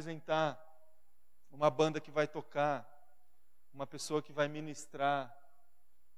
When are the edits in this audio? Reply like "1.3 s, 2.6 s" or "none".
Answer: none